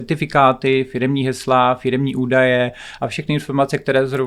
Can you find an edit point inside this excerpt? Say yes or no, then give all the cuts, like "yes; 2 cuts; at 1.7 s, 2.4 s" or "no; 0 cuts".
no; 0 cuts